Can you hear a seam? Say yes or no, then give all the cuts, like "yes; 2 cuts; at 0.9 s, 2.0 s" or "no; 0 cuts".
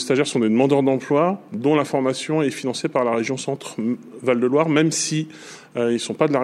no; 0 cuts